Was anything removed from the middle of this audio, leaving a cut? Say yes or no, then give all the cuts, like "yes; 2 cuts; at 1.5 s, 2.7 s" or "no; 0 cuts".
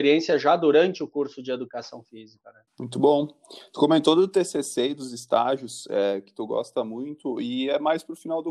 yes; 1 cut; at 2.7 s